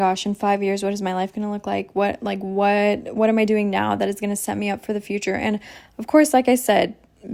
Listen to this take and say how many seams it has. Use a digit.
0